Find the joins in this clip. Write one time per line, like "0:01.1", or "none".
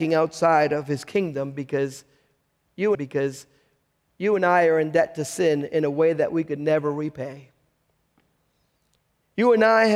0:02.9